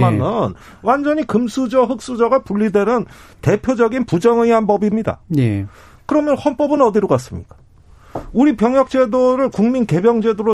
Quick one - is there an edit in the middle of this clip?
no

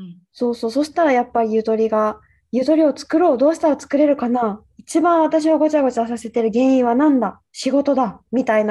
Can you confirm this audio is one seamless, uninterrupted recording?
yes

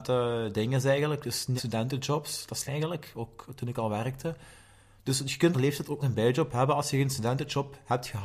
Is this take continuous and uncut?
no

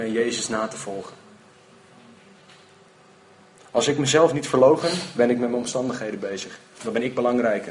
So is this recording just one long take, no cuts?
yes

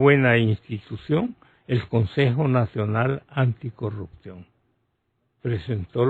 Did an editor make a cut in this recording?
no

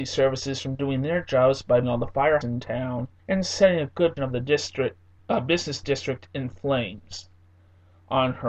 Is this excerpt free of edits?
no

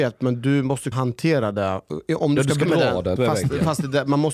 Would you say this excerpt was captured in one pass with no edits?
no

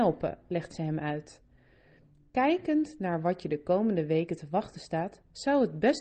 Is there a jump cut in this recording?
no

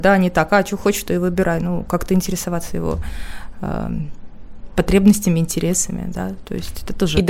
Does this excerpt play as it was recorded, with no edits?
yes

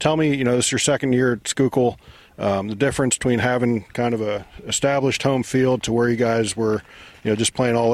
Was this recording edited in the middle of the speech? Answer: no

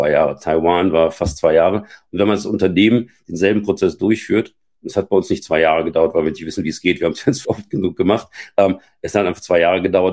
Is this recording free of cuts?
no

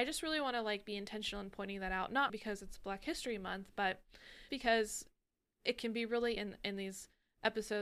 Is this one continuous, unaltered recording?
no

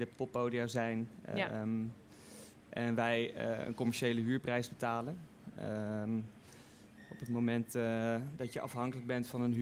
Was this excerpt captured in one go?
yes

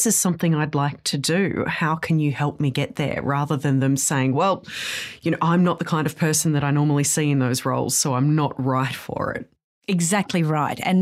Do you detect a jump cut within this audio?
no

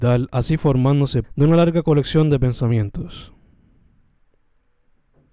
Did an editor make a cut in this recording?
yes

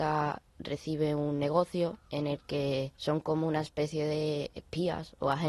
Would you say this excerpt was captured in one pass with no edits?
no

